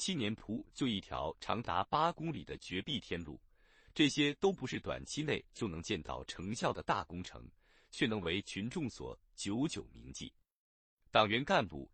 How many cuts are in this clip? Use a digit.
0